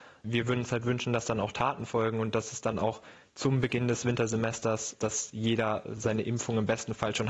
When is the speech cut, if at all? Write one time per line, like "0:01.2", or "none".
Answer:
0:05.0